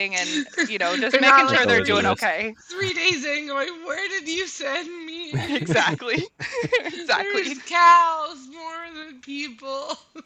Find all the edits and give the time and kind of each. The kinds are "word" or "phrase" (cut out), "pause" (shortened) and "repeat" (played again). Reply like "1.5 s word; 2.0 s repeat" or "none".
none